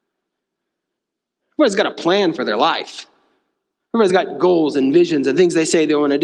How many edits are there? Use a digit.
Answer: 0